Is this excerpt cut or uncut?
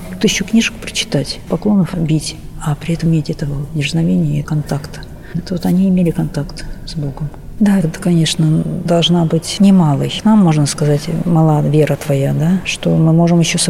cut